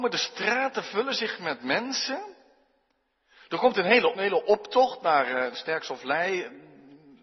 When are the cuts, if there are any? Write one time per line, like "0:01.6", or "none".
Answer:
0:04.2